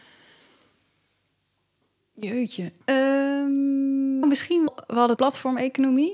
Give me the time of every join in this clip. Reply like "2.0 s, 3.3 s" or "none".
4.2 s, 4.7 s, 5.2 s